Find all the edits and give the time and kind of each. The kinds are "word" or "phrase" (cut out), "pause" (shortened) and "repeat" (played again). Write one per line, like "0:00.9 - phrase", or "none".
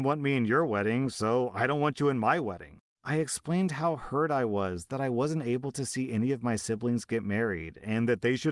none